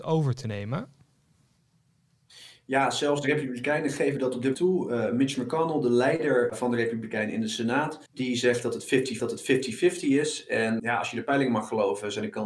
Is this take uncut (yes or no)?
no